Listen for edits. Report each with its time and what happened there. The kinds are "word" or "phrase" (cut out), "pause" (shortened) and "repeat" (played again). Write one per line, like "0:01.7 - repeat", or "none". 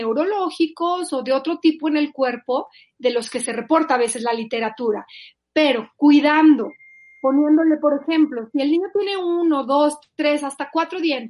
none